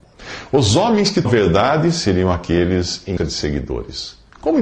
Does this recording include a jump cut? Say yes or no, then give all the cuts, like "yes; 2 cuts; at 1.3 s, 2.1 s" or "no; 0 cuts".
yes; 2 cuts; at 1.2 s, 3.2 s